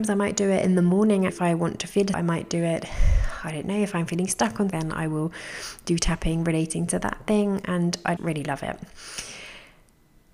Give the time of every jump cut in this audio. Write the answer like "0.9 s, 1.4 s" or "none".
1.3 s, 2.1 s, 4.7 s, 8.2 s